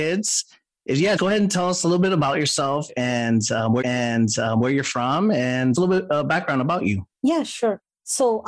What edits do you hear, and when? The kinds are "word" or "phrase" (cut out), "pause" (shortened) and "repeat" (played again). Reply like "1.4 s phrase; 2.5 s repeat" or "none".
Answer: 1.2 s word; 3.8 s repeat; 5.7 s word; 7.1 s pause